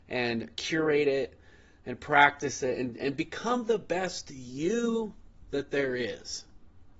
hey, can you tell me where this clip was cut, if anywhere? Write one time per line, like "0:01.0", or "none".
none